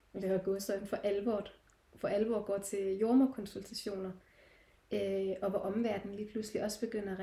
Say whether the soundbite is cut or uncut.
uncut